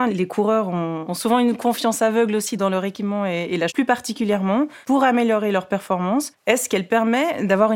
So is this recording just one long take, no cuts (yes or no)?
no